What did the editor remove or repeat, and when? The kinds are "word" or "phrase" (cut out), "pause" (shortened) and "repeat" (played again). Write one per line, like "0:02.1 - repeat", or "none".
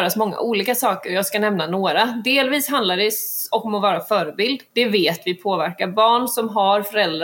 0:04.7 - pause